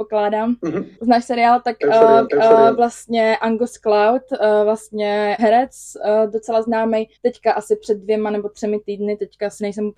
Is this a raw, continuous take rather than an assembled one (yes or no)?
no